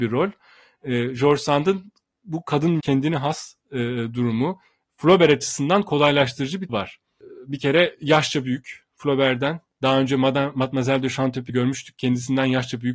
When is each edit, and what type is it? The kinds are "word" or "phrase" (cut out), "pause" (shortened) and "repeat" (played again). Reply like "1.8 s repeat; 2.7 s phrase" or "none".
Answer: 2.8 s word; 6.7 s word; 11.5 s word